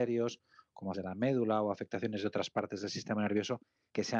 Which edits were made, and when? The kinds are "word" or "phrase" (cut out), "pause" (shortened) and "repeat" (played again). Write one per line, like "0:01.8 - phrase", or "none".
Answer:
0:00.9 - word